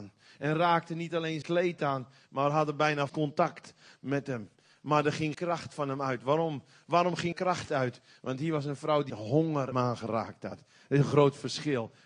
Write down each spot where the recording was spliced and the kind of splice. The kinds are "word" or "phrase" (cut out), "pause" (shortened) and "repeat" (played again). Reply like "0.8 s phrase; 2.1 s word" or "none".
1.4 s word; 3.1 s word; 5.3 s word; 7.3 s word; 9.1 s word; 9.7 s word